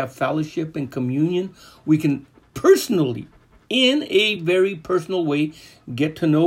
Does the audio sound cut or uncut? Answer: uncut